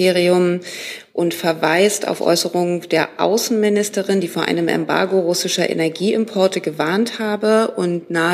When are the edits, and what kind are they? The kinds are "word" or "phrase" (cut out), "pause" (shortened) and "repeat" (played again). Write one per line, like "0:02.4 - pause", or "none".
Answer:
none